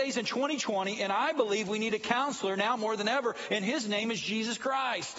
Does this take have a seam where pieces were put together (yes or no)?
no